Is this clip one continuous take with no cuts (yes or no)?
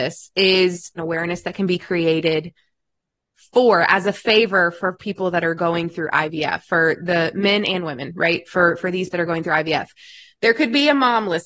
no